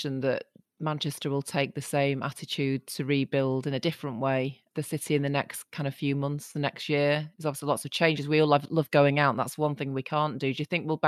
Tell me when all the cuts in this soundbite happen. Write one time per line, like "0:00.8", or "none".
0:07.3

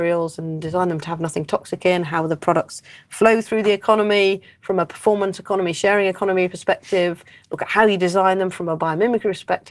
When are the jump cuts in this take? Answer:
none

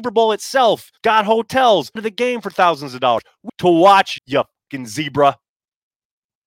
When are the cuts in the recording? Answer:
0:01.0
0:02.0
0:03.5
0:04.2

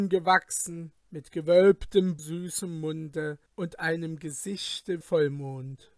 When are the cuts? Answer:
0:01.0
0:02.2
0:03.5
0:05.0

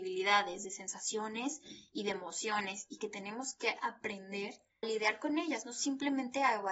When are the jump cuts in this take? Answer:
0:04.8

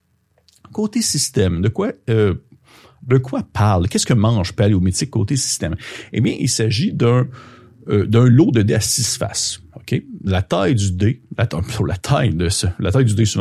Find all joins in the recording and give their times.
none

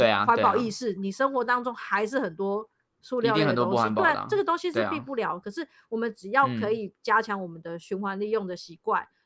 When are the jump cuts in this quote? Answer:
none

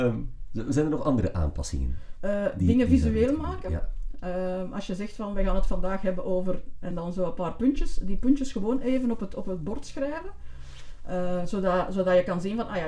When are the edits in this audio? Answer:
none

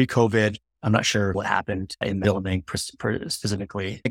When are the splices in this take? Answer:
0:02.2

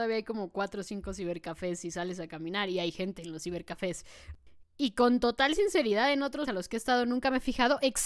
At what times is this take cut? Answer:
0:06.5

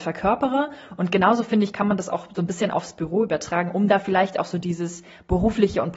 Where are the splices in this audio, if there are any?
none

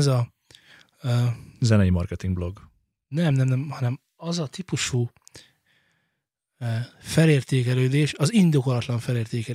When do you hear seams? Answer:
none

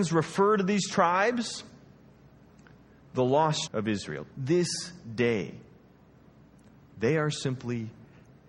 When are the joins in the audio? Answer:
0:03.7
0:04.3

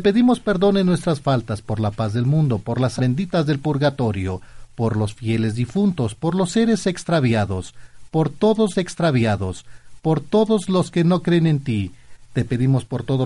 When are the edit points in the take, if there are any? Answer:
0:03.0
0:08.7

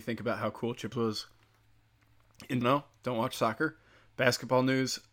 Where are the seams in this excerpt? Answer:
0:00.9
0:02.6

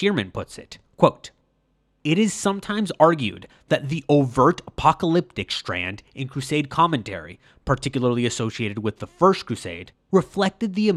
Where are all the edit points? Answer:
none

